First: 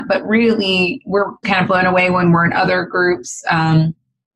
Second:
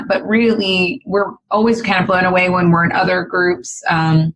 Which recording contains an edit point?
first; 1 cut; at 1.4 s

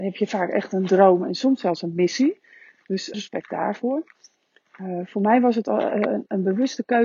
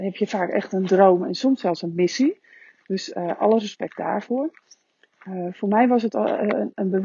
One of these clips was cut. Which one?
first; 1 cut; at 3.1 s

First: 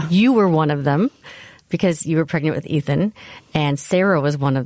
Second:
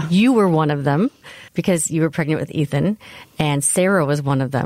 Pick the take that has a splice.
second; 1 cut; at 1.5 s

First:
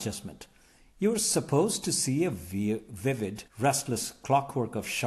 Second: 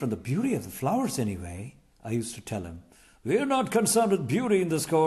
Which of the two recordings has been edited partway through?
first; 1 cut; at 3.5 s

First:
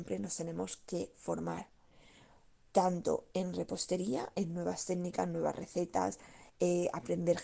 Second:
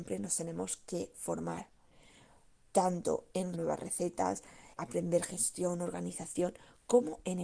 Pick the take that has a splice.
second; 2 cuts; at 3.5 s, 4.8 s

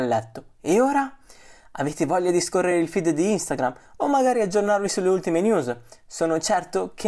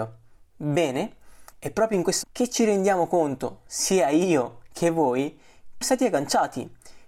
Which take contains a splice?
second; 3 cuts; at 1.5 s, 2.2 s, 5.8 s

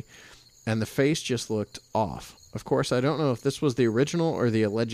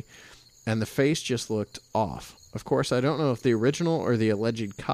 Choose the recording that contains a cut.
second; 1 cut; at 3.4 s

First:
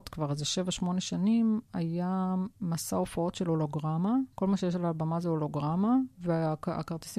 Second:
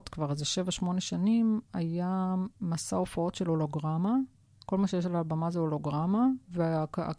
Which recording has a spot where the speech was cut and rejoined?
first; 1 cut; at 4.3 s

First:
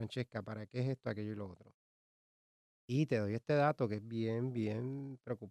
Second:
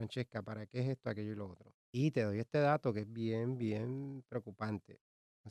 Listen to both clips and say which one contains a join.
second; 1 cut; at 1.8 s

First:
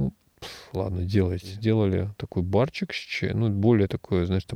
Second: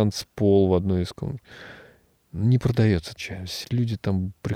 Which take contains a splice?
second; 2 cuts; at 3.2 s, 3.6 s

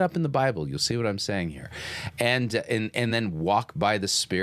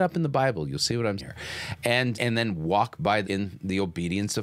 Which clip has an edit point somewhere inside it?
second; 3 cuts; at 1.2 s, 2.1 s, 3.2 s

